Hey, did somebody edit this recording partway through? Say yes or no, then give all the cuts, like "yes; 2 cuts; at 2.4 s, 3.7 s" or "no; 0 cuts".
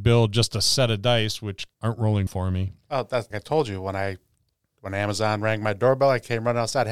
yes; 3 cuts; at 1.7 s, 2.3 s, 3.3 s